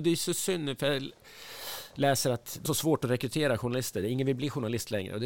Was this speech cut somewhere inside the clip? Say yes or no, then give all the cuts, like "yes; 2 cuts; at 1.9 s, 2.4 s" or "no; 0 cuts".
yes; 1 cut; at 2.7 s